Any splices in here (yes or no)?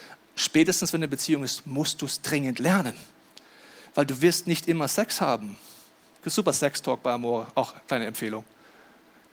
no